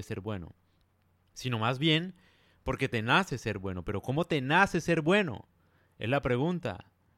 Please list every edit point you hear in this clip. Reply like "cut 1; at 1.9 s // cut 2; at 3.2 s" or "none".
none